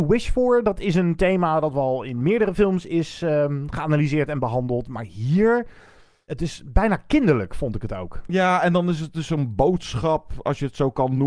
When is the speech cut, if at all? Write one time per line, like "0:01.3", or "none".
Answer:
none